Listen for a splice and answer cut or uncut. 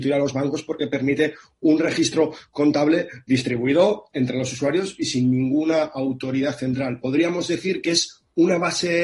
uncut